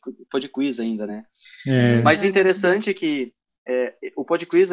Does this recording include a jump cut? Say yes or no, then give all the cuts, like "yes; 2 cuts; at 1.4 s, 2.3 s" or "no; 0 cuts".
no; 0 cuts